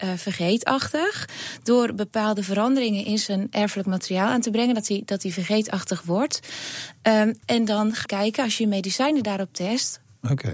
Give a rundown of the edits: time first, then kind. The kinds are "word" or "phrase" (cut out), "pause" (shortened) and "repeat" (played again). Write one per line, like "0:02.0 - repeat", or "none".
0:08.0 - word

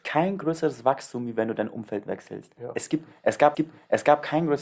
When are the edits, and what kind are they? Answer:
0:03.5 - repeat

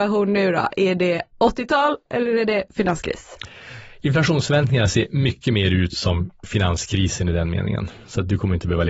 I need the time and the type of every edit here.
0:01.3 - pause

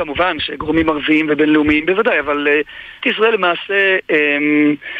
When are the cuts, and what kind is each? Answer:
0:03.0 - word

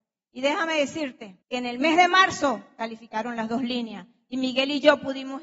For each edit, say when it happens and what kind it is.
0:01.4 - pause

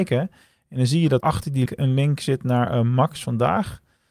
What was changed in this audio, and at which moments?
0:01.2 - word
0:01.7 - word

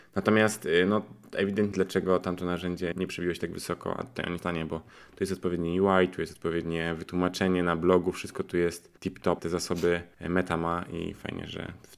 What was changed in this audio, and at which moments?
0:01.7 - word
0:02.9 - word
0:04.4 - phrase
0:09.0 - pause
0:09.4 - word
0:10.1 - pause

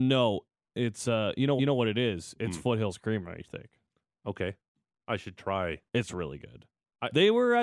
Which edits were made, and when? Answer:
0:01.6 - repeat
0:05.9 - pause

